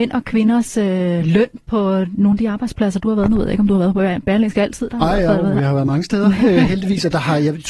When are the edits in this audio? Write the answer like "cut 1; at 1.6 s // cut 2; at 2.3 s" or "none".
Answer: none